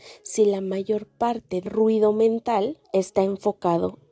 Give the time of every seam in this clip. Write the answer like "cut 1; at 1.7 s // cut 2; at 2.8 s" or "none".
cut 1; at 1.7 s // cut 2; at 2.8 s